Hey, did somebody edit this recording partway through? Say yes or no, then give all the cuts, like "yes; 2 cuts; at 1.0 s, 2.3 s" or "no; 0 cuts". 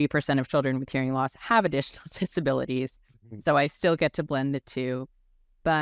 no; 0 cuts